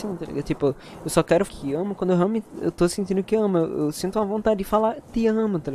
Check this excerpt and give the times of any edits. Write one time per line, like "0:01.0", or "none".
0:01.5